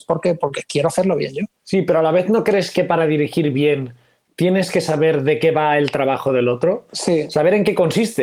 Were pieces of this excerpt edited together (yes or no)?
no